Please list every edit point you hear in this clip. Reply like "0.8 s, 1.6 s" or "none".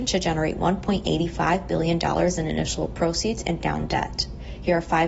3.6 s

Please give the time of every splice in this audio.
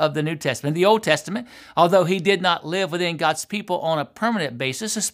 none

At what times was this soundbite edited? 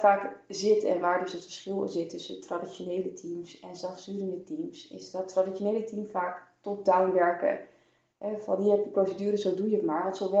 none

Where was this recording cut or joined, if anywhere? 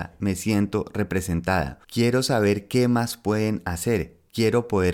1.8 s

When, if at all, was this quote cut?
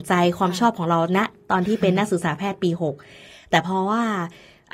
none

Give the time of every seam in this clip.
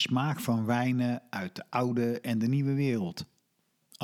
none

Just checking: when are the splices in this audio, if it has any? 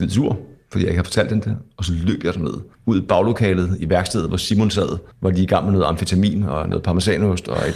2.7 s, 5.1 s

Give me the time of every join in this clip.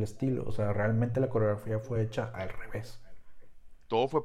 none

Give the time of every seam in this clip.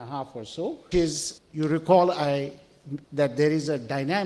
0.9 s, 1.4 s, 3.0 s

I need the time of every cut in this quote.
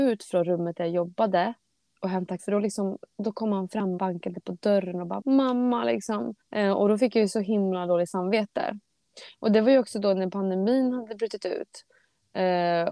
2.4 s, 4.0 s, 5.2 s, 6.4 s

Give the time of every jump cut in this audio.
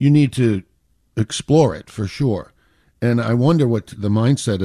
none

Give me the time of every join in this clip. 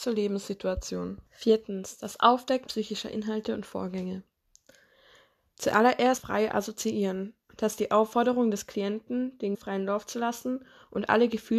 1.3 s, 2.7 s, 6.2 s, 7.4 s, 9.5 s

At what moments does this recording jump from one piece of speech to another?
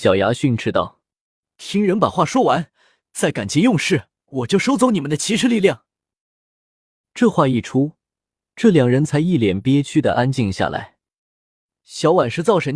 4.2 s

